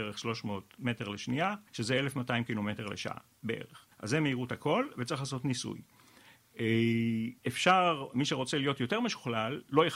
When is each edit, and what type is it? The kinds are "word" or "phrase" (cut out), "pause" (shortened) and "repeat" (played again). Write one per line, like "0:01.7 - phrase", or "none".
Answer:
0:01.7 - pause
0:03.9 - pause
0:07.4 - pause